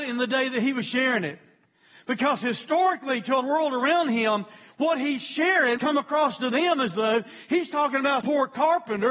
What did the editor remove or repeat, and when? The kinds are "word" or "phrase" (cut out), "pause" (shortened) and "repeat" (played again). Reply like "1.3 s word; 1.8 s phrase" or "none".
3.4 s word; 5.8 s word; 8.2 s word